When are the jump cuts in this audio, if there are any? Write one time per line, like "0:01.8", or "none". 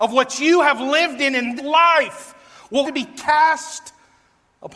0:01.6
0:02.8